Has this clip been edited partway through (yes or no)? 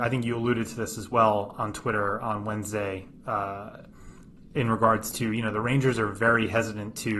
no